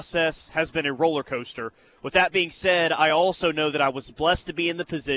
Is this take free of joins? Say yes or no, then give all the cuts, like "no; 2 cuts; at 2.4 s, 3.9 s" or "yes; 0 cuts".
yes; 0 cuts